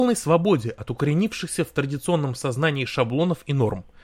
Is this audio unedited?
yes; 0 cuts

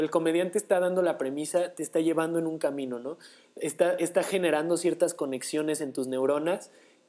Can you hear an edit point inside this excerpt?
no; 0 cuts

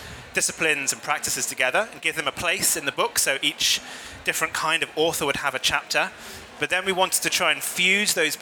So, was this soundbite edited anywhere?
no; 0 cuts

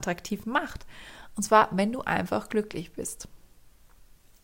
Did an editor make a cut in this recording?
no; 0 cuts

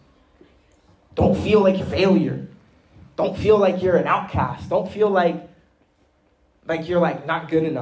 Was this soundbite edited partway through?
yes; 1 cut; at 1.8 s

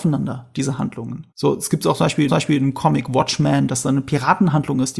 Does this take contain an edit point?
yes; 2 cuts; at 1.3 s, 2.3 s

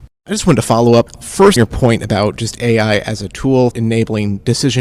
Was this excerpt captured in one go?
no; 2 cuts; at 1.6 s, 3.7 s

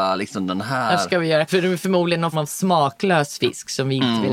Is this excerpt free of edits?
no; 2 cuts; at 1.5 s, 2.3 s

